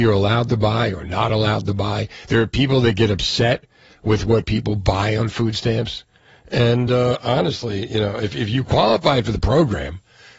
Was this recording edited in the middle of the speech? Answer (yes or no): no